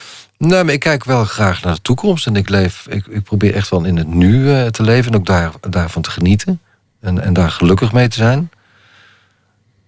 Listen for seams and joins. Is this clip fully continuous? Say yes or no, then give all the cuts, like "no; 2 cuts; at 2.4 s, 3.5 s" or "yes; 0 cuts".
yes; 0 cuts